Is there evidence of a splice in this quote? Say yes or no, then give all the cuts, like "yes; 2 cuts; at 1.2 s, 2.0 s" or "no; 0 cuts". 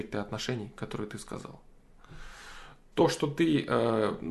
no; 0 cuts